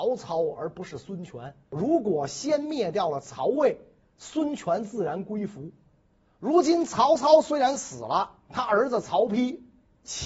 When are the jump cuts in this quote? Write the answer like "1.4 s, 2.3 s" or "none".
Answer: 1.6 s